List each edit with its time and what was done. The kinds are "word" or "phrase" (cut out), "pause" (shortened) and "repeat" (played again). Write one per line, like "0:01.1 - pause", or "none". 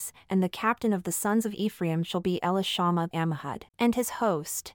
0:03.1 - phrase
0:03.7 - pause